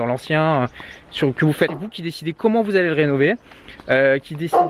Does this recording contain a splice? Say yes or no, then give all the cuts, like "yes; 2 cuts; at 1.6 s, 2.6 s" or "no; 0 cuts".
yes; 1 cut; at 1.7 s